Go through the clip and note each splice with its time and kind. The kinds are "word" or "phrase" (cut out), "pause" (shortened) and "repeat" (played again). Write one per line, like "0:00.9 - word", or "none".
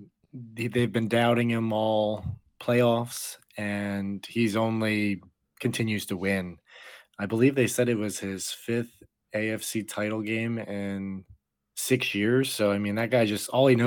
none